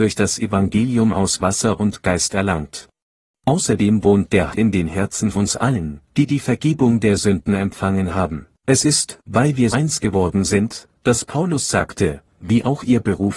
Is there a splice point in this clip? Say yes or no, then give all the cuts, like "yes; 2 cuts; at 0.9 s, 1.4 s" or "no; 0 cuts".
yes; 6 cuts; at 3.0 s, 4.5 s, 5.3 s, 6.1 s, 8.6 s, 9.7 s